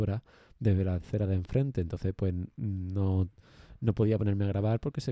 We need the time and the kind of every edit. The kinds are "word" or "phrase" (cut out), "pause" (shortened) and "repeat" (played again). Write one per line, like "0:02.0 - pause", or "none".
none

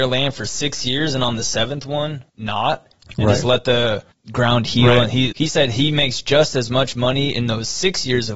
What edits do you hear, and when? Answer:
0:02.3 - pause
0:04.1 - pause
0:05.3 - phrase

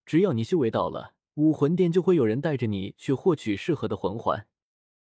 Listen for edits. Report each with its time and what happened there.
0:01.2 - pause

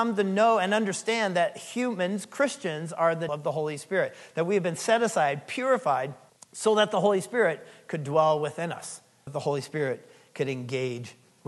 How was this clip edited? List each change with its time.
0:03.3 - word
0:06.3 - pause
0:09.3 - word

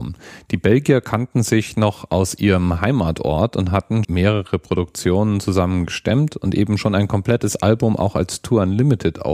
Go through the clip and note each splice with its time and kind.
0:04.0 - word

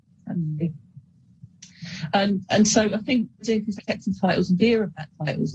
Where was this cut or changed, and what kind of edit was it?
0:02.4 - word
0:03.4 - word
0:03.8 - word
0:04.6 - word

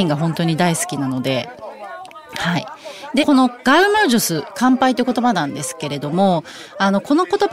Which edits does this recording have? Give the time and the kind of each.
0:03.2 - phrase

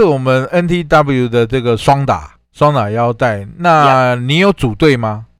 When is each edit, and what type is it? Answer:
0:02.4 - pause

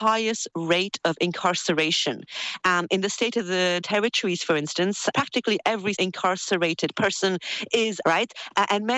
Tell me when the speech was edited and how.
0:03.8 - word
0:05.1 - word
0:06.0 - word
0:08.0 - word

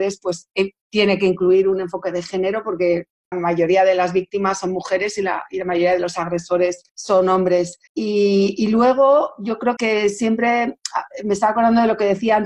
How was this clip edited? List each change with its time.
0:03.3 - phrase
0:06.9 - pause
0:07.9 - pause
0:09.8 - word

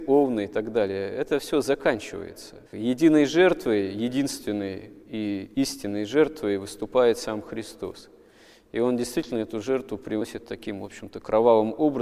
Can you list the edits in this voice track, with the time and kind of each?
0:02.6 - pause
0:05.0 - pause

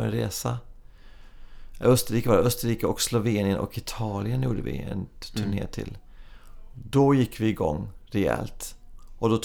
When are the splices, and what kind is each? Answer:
none

